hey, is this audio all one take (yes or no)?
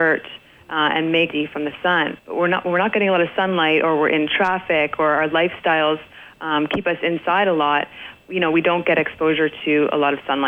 no